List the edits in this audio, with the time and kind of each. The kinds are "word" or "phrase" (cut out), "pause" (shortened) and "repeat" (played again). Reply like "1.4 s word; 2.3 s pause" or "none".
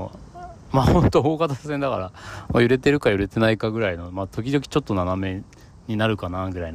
none